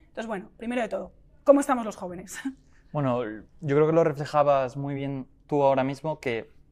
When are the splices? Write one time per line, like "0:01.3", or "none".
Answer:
none